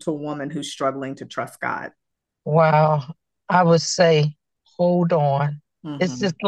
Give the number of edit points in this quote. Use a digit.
0